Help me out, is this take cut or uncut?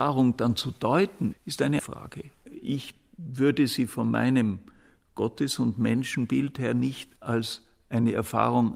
cut